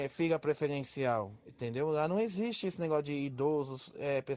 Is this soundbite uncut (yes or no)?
yes